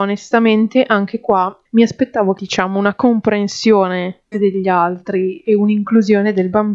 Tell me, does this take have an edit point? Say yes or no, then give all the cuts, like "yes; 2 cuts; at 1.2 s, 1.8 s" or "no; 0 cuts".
yes; 2 cuts; at 1.6 s, 4.3 s